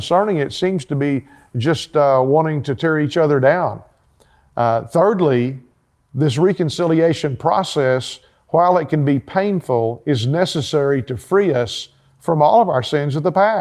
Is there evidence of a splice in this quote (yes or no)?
no